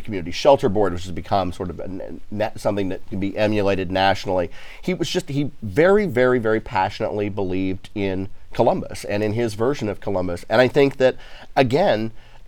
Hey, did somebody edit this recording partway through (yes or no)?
no